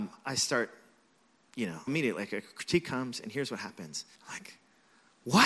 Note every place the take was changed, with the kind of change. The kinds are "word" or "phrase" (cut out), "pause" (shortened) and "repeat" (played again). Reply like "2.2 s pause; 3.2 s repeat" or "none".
1.9 s word; 4.2 s pause